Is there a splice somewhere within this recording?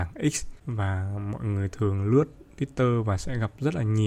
no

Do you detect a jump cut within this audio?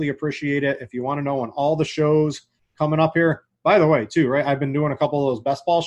no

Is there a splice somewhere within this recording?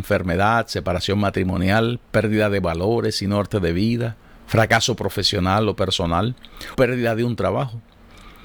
yes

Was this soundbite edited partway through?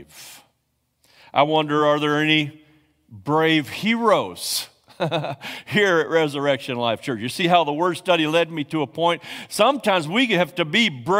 no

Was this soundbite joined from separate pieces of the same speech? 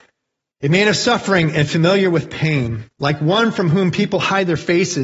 yes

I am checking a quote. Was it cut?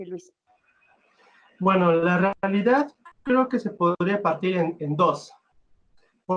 no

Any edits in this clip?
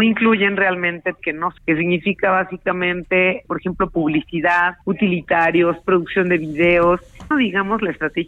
yes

